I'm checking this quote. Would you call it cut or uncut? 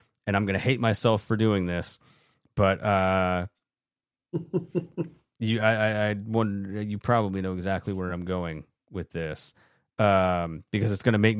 uncut